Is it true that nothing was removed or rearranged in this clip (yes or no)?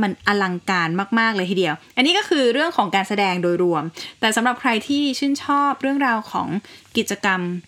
yes